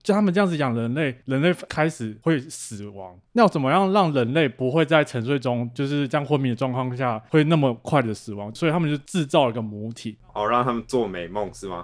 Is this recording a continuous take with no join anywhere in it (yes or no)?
no